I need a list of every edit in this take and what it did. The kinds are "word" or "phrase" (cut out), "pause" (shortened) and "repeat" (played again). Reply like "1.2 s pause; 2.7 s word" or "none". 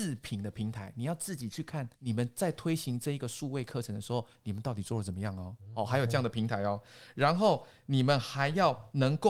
1.9 s pause

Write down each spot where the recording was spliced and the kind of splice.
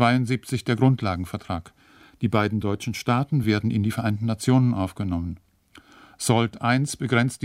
none

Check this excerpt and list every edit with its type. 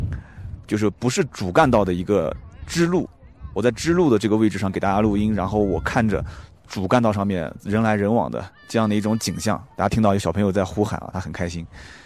8.6 s pause

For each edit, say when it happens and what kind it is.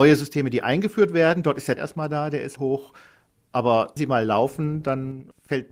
1.8 s word; 2.6 s word; 4.0 s word

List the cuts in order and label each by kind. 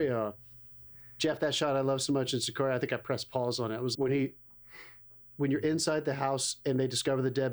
3.9 s word

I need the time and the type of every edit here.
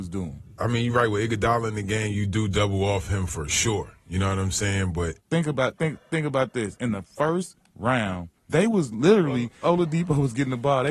5.8 s word; 8.4 s pause; 9.6 s phrase

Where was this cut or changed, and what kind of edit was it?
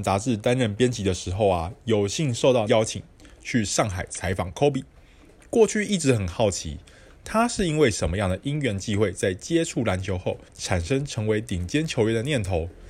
2.7 s word; 10.5 s pause

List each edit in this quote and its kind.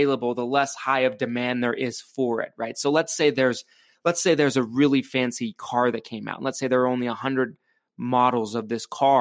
none

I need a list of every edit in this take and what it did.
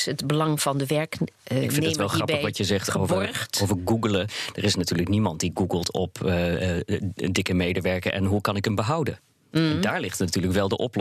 none

